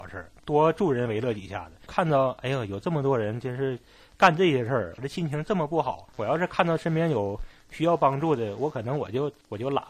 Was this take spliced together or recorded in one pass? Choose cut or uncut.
uncut